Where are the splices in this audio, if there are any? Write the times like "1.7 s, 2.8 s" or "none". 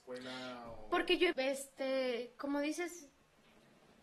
1.3 s